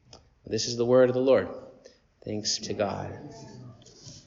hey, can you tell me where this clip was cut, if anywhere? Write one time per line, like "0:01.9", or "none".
0:02.6